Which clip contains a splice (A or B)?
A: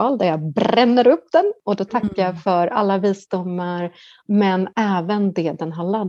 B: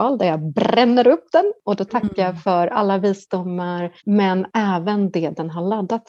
B